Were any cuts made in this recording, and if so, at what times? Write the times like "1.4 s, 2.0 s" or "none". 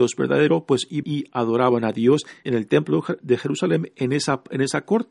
1.0 s, 2.4 s, 3.2 s